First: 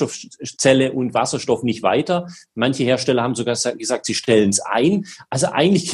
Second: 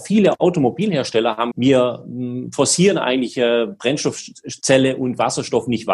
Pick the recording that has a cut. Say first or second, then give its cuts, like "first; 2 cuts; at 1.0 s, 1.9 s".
second; 1 cut; at 1.5 s